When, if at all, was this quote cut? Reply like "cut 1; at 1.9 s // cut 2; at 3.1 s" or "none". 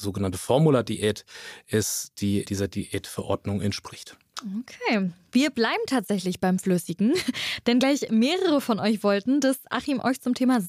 cut 1; at 2.5 s